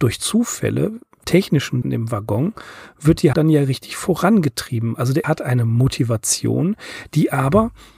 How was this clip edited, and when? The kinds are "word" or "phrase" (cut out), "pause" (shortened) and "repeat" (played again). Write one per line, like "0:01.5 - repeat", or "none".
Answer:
0:01.2 - word
0:01.8 - word
0:03.3 - word
0:05.2 - word